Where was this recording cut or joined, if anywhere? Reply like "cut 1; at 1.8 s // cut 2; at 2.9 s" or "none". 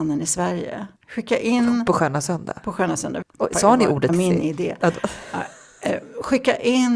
cut 1; at 1.0 s // cut 2; at 3.2 s // cut 3; at 4.1 s